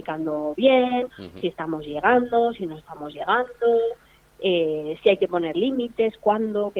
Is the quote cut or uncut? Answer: uncut